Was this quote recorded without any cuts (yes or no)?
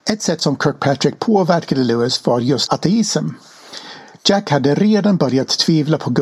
no